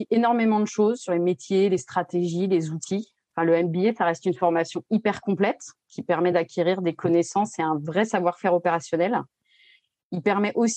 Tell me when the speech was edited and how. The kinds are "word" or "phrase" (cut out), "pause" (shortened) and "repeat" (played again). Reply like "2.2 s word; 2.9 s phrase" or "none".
none

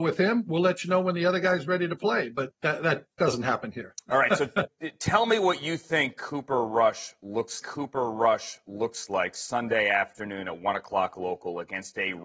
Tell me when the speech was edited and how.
7.6 s repeat

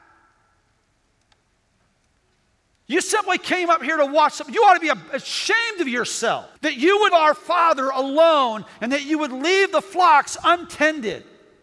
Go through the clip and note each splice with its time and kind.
6.6 s pause; 7.1 s word

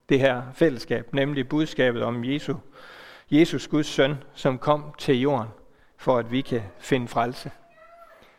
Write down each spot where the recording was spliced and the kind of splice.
none

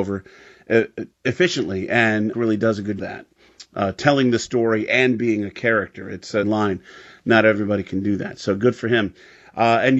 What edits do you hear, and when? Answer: 1.1 s pause; 2.3 s phrase; 3.0 s phrase; 6.4 s phrase

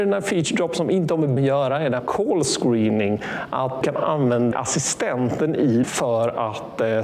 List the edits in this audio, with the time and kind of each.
1.4 s word; 2.0 s word; 3.8 s word; 4.5 s word; 5.8 s word

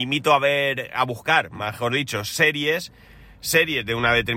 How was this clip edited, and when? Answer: none

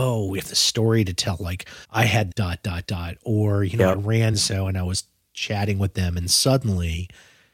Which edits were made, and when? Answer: 1.8 s pause; 2.3 s phrase; 4.3 s phrase

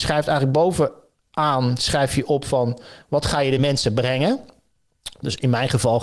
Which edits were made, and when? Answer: none

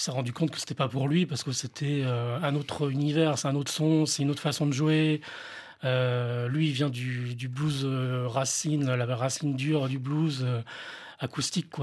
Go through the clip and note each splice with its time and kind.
none

